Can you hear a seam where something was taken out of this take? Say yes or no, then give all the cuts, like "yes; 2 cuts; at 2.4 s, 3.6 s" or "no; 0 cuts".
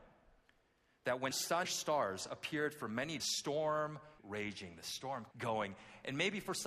yes; 5 cuts; at 1.3 s, 1.6 s, 3.2 s, 4.2 s, 5.3 s